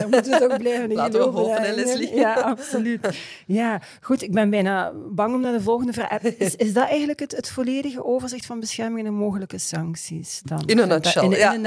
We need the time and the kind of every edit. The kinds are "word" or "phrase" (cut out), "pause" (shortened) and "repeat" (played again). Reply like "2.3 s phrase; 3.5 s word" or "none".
none